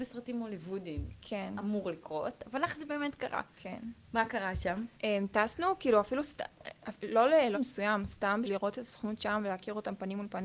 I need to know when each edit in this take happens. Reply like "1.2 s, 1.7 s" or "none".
3.5 s, 4.9 s, 7.5 s, 8.4 s